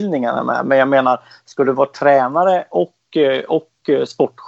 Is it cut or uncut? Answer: uncut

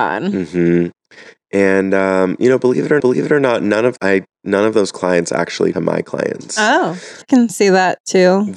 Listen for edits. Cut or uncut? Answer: cut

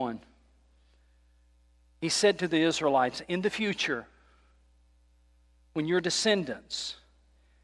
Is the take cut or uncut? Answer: uncut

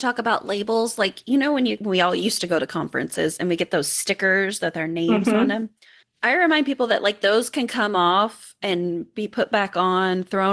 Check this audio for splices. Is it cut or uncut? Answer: uncut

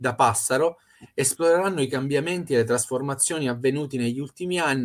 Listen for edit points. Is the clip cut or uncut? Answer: uncut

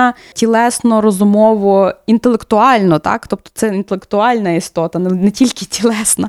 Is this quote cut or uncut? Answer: uncut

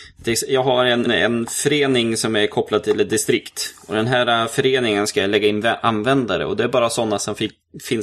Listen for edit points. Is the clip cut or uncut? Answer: cut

